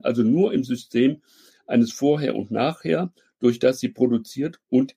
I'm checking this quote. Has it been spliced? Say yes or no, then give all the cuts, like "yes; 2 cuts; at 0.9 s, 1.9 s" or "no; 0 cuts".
no; 0 cuts